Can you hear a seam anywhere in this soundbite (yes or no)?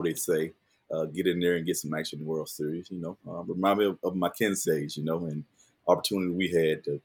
yes